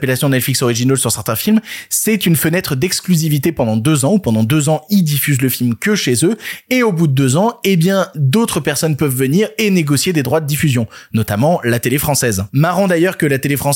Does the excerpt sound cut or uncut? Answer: uncut